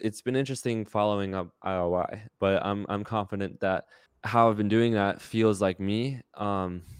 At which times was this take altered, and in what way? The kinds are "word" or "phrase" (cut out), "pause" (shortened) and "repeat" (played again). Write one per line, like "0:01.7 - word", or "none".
0:04.1 - pause

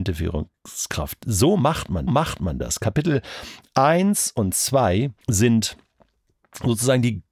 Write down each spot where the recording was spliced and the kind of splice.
0:02.1 - repeat
0:05.2 - pause

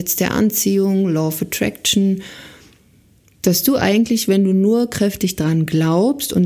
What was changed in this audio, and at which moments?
none

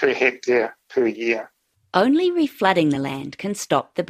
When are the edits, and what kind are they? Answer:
none

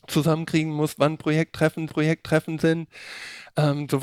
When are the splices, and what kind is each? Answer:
0:01.9 - repeat

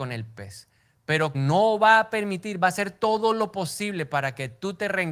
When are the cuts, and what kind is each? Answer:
0:01.3 - word

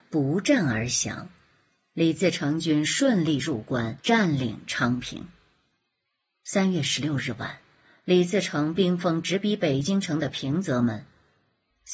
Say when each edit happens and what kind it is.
0:04.0 - pause

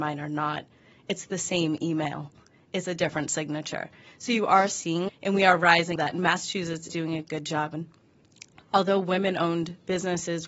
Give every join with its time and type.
0:05.1 - word
0:06.0 - word
0:06.9 - word

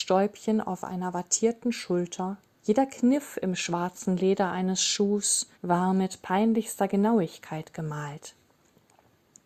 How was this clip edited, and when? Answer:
0:02.5 - pause
0:05.5 - pause

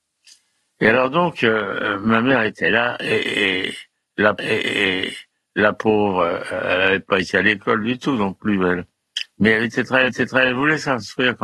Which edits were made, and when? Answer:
0:04.4 - repeat
0:10.1 - repeat

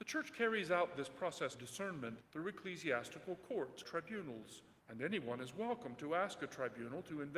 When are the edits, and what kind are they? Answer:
0:01.5 - word
0:02.2 - phrase
0:03.8 - word
0:04.8 - pause

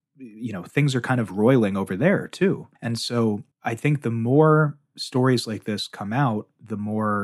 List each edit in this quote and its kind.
0:02.8 - pause
0:03.5 - pause

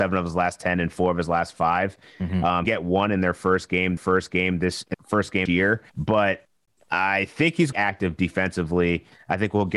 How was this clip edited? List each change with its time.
0:02.6 - phrase
0:04.0 - repeat
0:04.9 - word
0:05.5 - word
0:05.9 - pause
0:07.7 - phrase

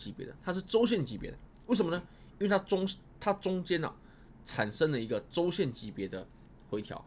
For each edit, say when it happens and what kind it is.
none

